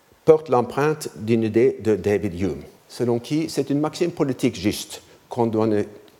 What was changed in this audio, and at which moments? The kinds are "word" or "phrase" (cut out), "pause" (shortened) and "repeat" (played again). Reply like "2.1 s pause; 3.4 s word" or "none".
2.8 s pause